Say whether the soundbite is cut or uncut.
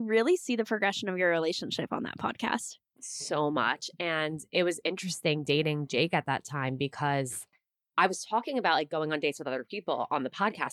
uncut